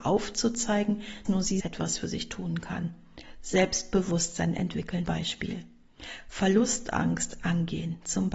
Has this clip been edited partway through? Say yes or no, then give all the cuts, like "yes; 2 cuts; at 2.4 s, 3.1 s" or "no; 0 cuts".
yes; 3 cuts; at 1.2 s, 1.6 s, 5.1 s